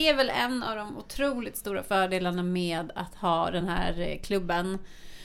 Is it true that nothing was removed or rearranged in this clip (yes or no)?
yes